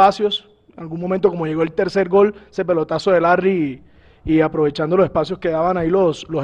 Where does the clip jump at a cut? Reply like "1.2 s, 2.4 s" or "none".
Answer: none